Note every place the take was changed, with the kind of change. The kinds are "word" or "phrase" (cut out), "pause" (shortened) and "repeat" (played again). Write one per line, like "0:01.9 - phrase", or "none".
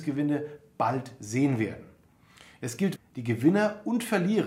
0:03.0 - word

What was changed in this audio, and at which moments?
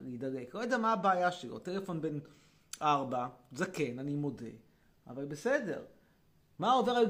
none

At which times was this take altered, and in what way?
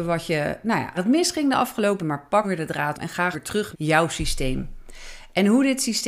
0:00.9 - word
0:02.0 - word
0:02.4 - word
0:02.9 - word
0:03.3 - word
0:03.7 - word

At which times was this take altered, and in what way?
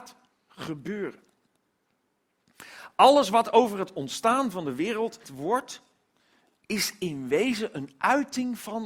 0:05.2 - word

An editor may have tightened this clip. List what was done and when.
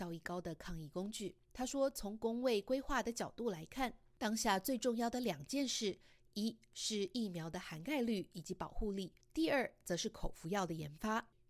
none

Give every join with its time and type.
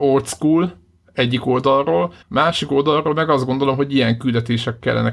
0:02.2 - pause

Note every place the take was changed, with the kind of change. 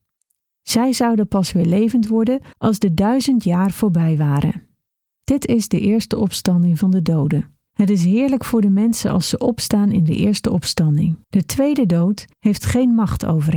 0:02.5 - pause
0:04.9 - pause
0:07.7 - pause
0:11.2 - pause
0:12.3 - pause

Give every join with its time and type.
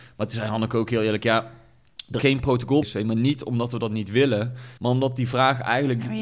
0:02.2 - word
0:02.8 - word
0:04.8 - pause

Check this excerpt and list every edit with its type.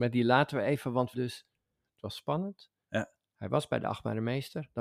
0:01.1 - phrase

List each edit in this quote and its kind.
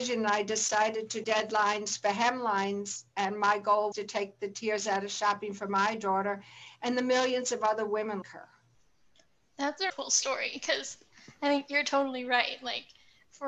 0:01.2 - word
0:03.9 - word
0:08.2 - word
0:09.9 - word

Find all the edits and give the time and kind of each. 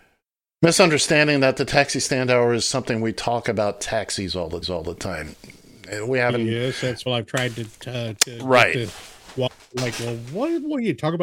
0:04.6 - repeat
0:07.1 - phrase

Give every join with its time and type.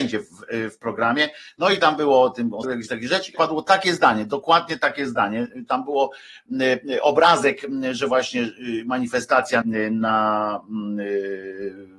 0:02.6 - word
0:03.3 - word
0:09.6 - word

